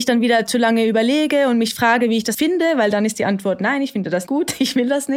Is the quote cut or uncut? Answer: cut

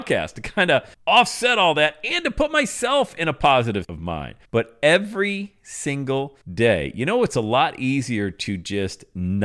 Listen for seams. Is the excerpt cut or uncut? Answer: cut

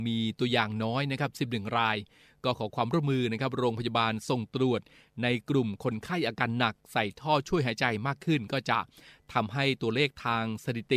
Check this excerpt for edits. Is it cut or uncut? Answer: uncut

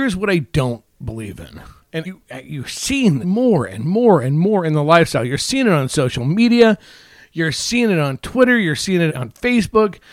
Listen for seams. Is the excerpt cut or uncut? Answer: cut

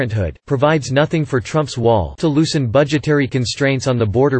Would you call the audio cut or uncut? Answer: cut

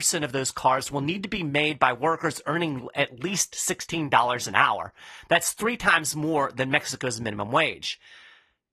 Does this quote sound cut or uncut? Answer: uncut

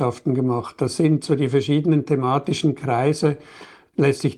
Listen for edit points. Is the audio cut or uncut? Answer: uncut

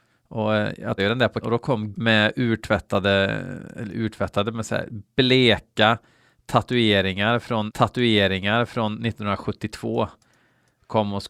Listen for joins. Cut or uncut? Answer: cut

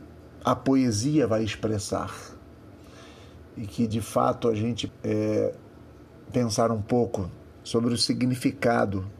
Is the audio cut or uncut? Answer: cut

